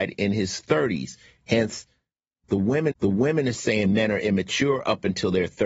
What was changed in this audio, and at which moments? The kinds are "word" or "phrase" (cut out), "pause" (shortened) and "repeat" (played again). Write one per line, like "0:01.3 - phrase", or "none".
0:02.9 - repeat